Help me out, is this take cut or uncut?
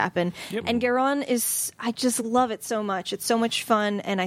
uncut